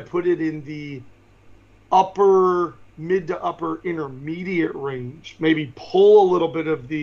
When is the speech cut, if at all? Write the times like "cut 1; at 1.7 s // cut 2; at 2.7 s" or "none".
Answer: none